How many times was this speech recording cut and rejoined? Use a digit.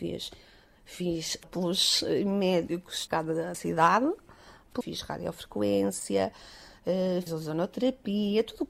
5